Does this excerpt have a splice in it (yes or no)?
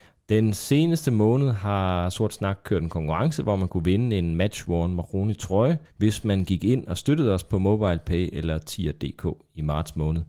yes